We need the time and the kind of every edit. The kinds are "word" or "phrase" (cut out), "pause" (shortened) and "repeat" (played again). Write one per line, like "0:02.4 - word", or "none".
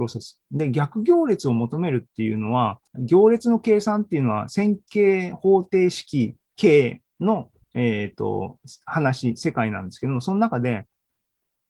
0:02.9 - pause
0:06.5 - pause
0:07.6 - pause